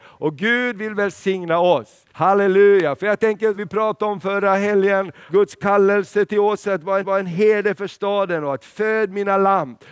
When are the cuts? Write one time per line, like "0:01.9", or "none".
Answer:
0:02.1
0:03.6
0:05.3
0:07.0